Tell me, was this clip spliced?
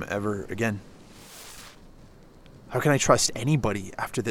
no; 0 cuts

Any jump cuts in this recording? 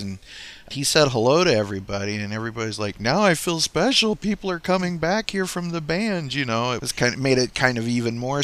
no; 0 cuts

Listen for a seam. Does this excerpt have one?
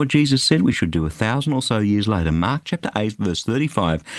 no; 0 cuts

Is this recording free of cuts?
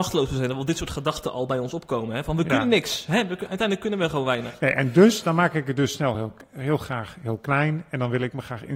yes; 0 cuts

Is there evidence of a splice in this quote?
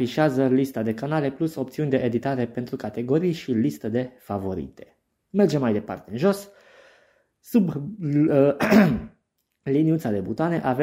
no; 0 cuts

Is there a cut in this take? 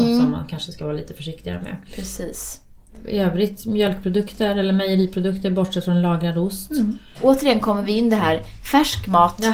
no; 0 cuts

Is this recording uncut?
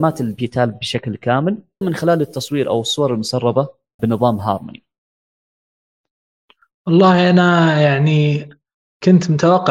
no; 2 cuts; at 1.8 s, 4.0 s

